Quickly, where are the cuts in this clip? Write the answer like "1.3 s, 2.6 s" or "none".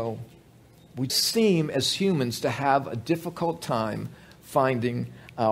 1.1 s